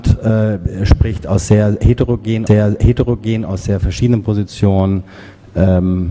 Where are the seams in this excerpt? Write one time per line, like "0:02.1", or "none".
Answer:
0:02.5